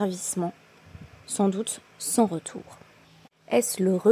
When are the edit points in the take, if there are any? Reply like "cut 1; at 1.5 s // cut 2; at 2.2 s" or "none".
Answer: cut 1; at 3.0 s